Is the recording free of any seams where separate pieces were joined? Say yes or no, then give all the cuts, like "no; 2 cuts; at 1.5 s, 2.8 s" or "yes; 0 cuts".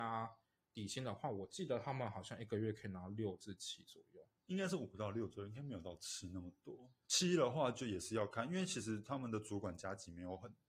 no; 1 cut; at 4.4 s